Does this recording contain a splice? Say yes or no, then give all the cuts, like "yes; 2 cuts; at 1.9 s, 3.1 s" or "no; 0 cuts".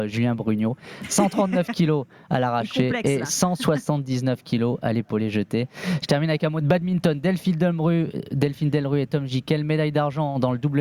no; 0 cuts